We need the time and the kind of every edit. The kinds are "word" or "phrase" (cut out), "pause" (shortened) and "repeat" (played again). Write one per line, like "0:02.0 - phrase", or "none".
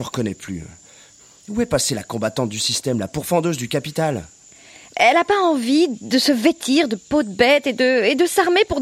none